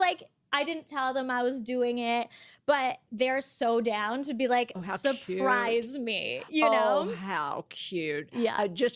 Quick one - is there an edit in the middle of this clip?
no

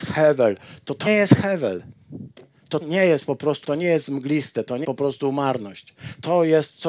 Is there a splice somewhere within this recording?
yes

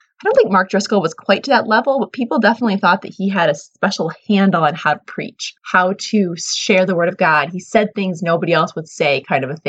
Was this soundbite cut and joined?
yes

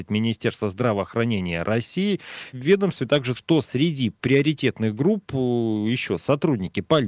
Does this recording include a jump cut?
yes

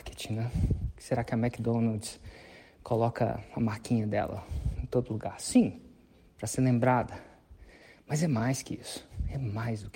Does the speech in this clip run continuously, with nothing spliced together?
yes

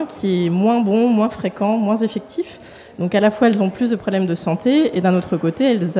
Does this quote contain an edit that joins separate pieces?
no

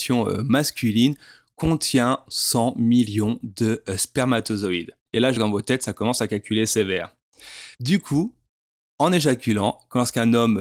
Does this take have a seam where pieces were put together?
yes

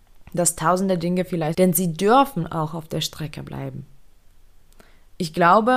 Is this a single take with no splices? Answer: no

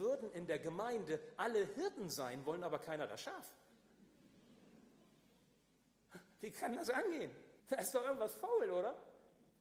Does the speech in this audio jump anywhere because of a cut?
yes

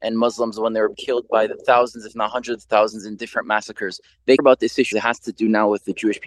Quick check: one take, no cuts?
no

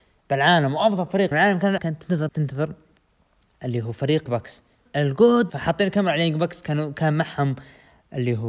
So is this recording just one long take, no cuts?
no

